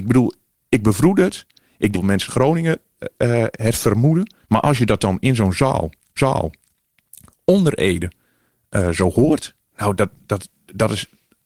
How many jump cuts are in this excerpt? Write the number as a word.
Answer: five